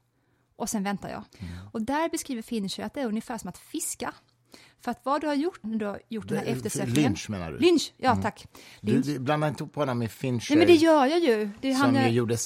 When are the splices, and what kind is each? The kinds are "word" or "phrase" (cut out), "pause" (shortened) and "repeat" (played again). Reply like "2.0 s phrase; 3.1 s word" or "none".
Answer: 1.3 s pause; 5.6 s word